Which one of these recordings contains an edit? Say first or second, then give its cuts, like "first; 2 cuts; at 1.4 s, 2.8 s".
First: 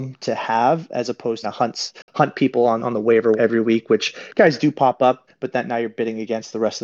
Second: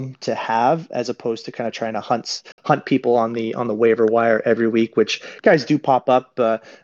first; 4 cuts; at 1.4 s, 2.8 s, 3.4 s, 5.3 s